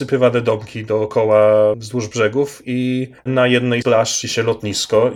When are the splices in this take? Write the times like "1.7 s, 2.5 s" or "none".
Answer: 3.2 s, 3.8 s, 4.2 s